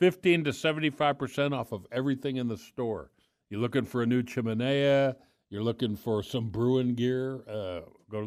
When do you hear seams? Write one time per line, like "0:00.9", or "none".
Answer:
none